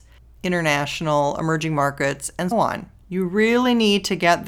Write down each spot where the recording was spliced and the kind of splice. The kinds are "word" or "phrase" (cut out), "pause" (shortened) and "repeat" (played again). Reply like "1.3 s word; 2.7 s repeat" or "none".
2.5 s word; 3.0 s pause